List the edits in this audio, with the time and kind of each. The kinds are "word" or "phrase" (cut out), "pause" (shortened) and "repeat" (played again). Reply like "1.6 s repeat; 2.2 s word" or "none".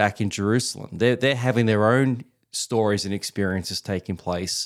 none